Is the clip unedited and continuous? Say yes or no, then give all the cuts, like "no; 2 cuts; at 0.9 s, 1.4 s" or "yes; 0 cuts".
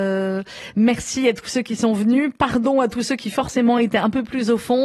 yes; 0 cuts